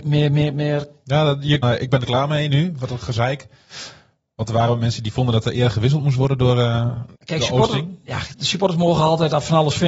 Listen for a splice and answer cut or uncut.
cut